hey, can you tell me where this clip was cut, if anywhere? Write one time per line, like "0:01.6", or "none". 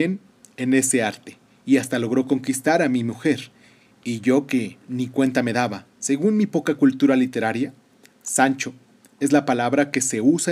0:05.9